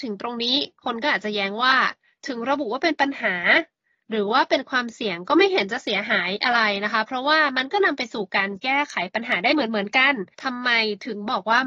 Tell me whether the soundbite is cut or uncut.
cut